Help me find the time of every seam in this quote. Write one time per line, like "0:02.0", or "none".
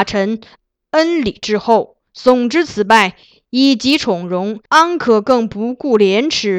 0:04.7